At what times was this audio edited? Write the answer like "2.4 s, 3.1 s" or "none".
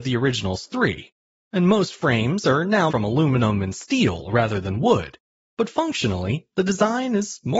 2.9 s